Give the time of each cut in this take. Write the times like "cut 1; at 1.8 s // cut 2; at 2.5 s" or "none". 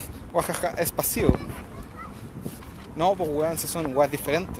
none